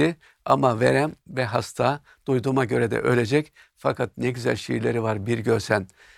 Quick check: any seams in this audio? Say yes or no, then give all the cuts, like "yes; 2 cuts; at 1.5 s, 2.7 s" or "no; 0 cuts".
no; 0 cuts